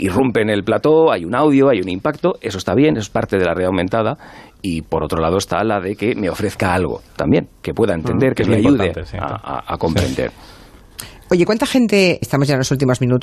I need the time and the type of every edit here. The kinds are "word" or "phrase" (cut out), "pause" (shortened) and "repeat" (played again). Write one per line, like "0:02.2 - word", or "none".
0:12.2 - word